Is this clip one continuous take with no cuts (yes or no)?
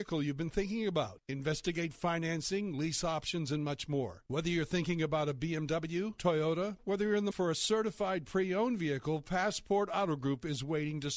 no